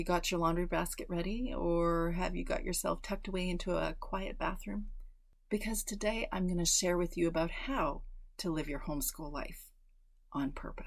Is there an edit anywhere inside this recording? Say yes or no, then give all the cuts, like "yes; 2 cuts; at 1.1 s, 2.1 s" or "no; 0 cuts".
no; 0 cuts